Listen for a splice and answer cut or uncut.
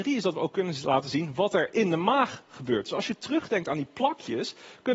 uncut